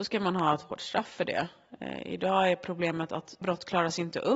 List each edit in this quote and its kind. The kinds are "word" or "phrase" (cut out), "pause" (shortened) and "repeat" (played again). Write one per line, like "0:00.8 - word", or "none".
0:03.4 - word